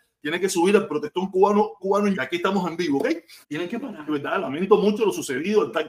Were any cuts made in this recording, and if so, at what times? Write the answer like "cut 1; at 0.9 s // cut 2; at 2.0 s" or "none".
cut 1; at 1.8 s // cut 2; at 2.1 s // cut 3; at 3.4 s // cut 4; at 4.1 s